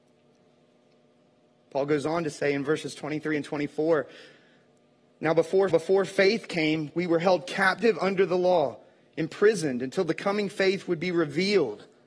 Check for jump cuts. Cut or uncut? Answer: cut